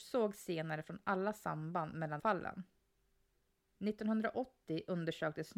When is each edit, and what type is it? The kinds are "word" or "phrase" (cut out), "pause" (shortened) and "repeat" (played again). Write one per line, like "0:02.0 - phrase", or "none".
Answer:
0:02.2 - phrase

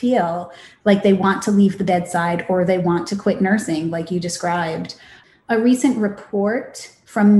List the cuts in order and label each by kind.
none

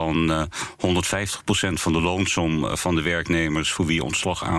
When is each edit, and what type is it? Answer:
none

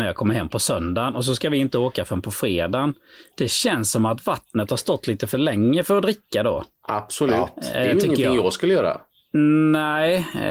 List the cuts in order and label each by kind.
none

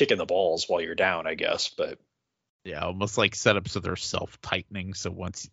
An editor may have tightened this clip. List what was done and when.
none

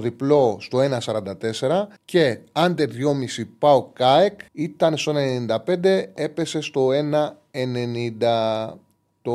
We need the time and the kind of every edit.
0:02.0 - pause
0:04.5 - pause

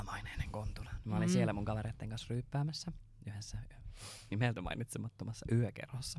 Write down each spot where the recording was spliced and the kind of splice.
none

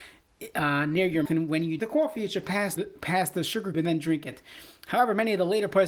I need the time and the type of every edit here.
0:01.3 - word
0:01.8 - word
0:02.8 - word
0:03.7 - word

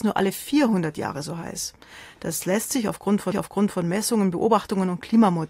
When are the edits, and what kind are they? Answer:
0:03.3 - repeat

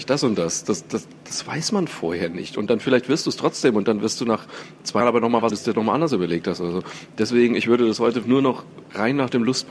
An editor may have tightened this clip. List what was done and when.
0:05.0 - word
0:05.5 - phrase
0:08.2 - word

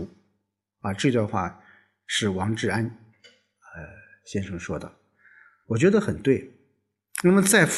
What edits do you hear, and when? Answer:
none

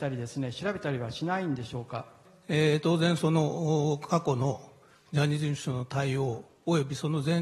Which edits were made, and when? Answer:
none

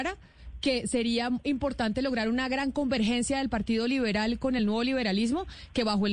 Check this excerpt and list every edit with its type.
none

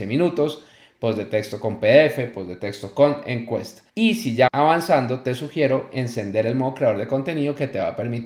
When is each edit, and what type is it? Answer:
0:03.9 - pause
0:04.5 - word

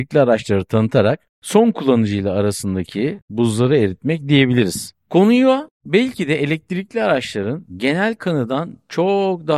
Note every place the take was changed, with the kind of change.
0:01.3 - pause

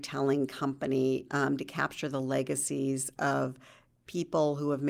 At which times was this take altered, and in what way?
0:01.6 - word

